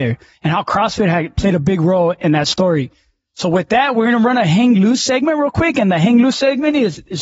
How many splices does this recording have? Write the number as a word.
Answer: zero